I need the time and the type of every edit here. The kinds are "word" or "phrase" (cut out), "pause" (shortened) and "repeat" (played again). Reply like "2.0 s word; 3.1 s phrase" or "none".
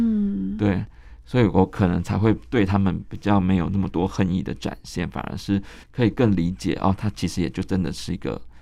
5.8 s pause